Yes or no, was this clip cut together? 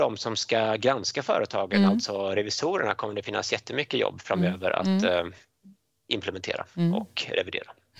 no